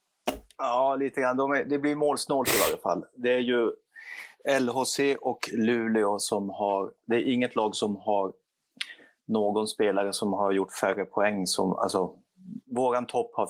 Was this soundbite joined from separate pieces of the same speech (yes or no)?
no